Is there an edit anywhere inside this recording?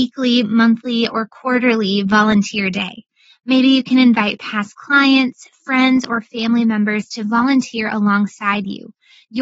no; 0 cuts

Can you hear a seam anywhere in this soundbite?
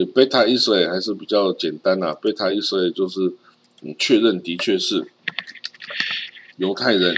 no; 0 cuts

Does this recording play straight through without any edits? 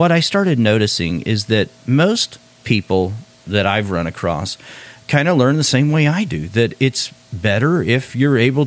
yes; 0 cuts

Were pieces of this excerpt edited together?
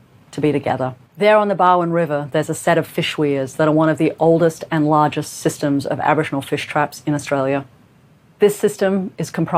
yes; 1 cut; at 1.0 s

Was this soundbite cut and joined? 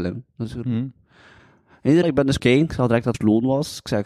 yes; 3 cuts; at 2.0 s, 2.4 s, 3.1 s

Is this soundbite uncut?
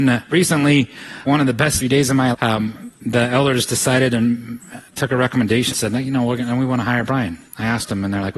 no; 7 cuts; at 1.3 s, 1.8 s, 2.3 s, 3.0 s, 4.9 s, 5.7 s, 7.5 s

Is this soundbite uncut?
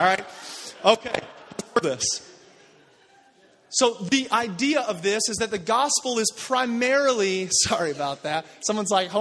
no; 1 cut; at 1.8 s

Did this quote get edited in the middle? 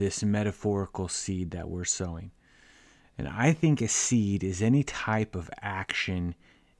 no; 0 cuts

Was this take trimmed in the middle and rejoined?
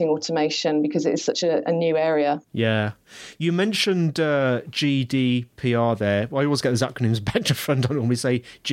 yes; 1 cut; at 2.4 s

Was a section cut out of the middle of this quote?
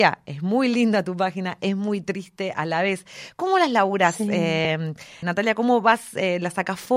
yes; 1 cut; at 5.2 s

